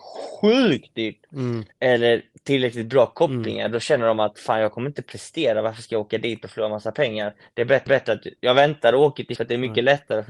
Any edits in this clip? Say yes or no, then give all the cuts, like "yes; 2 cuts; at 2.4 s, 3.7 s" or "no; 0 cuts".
yes; 3 cuts; at 1.7 s, 7.9 s, 9.4 s